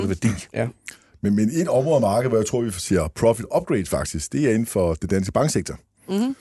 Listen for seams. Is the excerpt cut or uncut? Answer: uncut